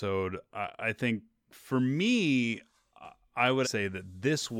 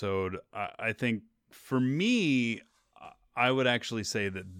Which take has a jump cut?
first; 1 cut; at 3.6 s

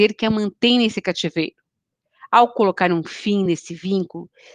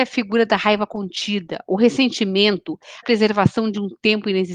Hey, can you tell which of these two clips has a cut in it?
second; 1 cut; at 3.0 s

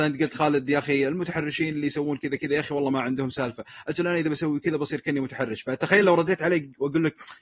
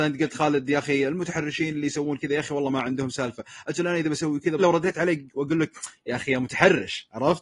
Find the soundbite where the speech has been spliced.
second; 2 cuts; at 2.2 s, 4.6 s

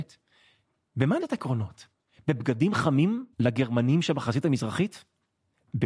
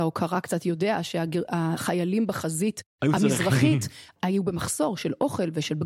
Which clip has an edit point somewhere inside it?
first; 2 cuts; at 1.2 s, 3.3 s

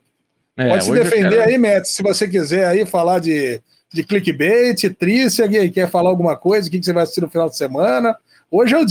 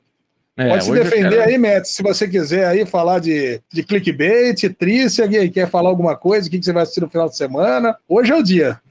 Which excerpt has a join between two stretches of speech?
second; 2 cuts; at 3.7 s, 8.0 s

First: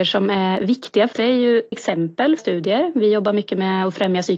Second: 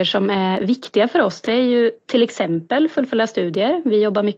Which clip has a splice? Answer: first; 3 cuts; at 1.1 s, 1.7 s, 2.4 s

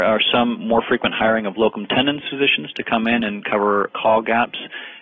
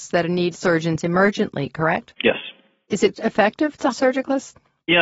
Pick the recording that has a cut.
second; 2 cuts; at 3.1 s, 3.9 s

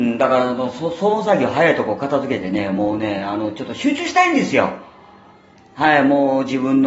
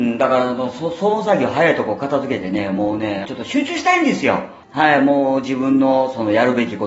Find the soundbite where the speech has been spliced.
second; 2 cuts; at 3.2 s, 4.6 s

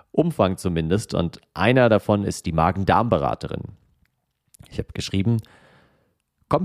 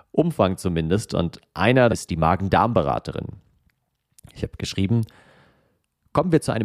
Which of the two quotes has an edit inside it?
second; 1 cut; at 1.9 s

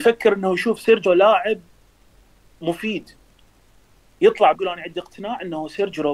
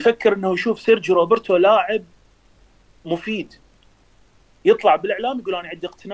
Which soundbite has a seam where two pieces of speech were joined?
first; 2 cuts; at 1.0 s, 4.5 s

